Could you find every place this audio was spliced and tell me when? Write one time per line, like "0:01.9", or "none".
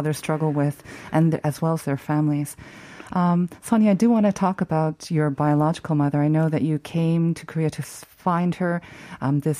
none